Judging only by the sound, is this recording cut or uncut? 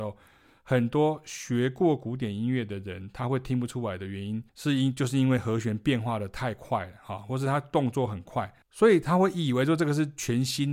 cut